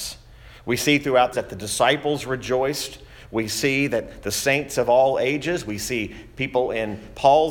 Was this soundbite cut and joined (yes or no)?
yes